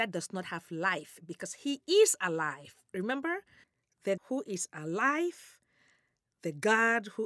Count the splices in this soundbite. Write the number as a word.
one